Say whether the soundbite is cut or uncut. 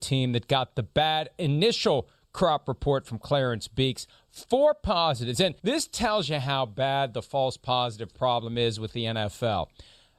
cut